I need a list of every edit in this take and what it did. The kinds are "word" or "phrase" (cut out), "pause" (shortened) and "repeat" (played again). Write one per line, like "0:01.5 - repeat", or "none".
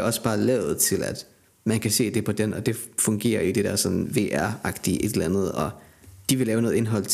none